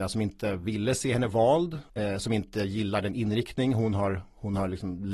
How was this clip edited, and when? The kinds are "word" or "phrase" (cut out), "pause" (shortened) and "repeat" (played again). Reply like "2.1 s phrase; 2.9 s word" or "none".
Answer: 1.9 s pause